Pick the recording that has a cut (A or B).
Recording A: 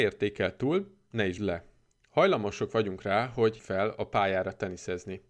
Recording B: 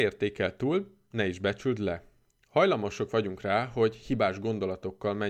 A